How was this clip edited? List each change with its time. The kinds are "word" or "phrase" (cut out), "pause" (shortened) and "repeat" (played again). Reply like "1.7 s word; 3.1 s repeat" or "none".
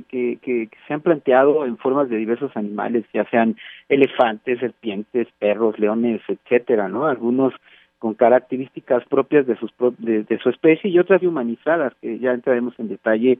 9.0 s word; 11.2 s word